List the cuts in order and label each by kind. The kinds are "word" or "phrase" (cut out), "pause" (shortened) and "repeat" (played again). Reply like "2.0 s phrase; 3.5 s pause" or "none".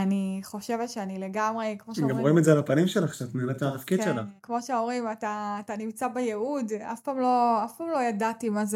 4.4 s pause